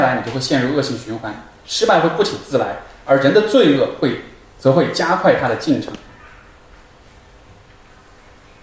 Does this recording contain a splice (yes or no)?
no